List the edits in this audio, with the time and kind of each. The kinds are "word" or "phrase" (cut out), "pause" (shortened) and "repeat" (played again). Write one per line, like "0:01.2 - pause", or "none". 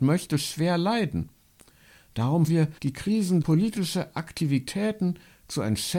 0:02.5 - word
0:02.8 - pause
0:03.4 - word